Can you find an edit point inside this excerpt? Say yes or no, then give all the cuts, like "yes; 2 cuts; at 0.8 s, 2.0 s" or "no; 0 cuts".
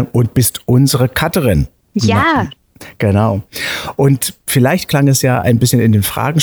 no; 0 cuts